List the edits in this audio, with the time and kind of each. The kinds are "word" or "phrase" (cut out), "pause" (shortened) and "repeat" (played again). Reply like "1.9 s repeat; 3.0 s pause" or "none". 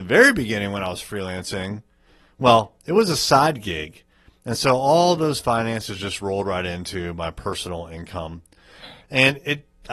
none